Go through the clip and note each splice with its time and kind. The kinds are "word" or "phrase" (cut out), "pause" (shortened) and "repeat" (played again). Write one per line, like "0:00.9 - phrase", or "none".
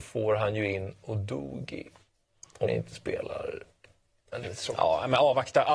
0:02.7 - word
0:04.4 - word